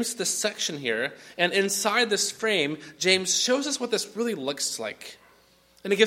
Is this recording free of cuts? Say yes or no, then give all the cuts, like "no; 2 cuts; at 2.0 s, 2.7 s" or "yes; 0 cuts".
yes; 0 cuts